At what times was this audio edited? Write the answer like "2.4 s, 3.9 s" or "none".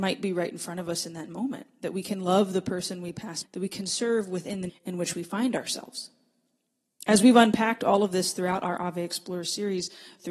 3.4 s, 4.7 s